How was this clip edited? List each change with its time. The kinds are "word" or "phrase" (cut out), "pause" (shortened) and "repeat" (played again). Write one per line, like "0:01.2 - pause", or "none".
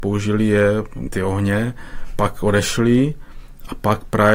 0:01.1 - phrase

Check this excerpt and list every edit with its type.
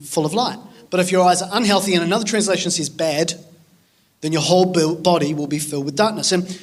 none

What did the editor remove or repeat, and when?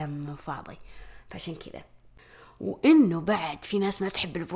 none

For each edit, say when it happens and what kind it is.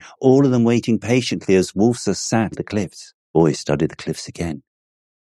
0:02.5 - word
0:03.2 - pause

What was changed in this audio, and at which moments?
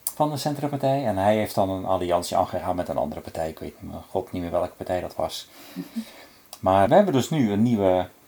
0:06.9 - word

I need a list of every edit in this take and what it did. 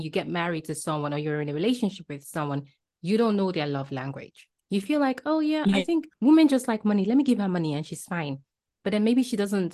0:04.6 - pause

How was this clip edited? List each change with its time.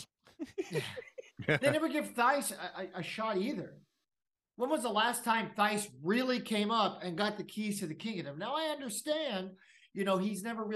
none

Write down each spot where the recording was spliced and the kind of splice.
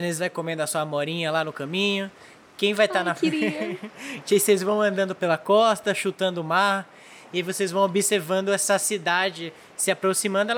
none

